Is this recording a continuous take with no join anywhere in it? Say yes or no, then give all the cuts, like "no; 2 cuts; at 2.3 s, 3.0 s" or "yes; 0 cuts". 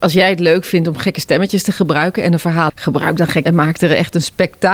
no; 2 cuts; at 2.7 s, 3.4 s